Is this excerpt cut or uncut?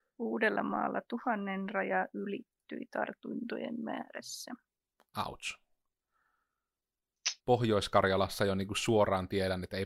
cut